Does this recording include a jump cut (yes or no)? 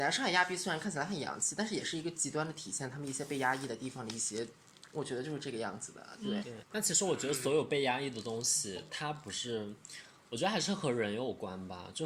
yes